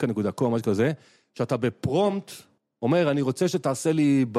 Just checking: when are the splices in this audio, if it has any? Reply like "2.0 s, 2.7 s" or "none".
none